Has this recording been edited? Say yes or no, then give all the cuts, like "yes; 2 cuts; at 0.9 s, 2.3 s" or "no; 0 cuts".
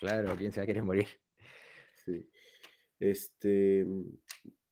no; 0 cuts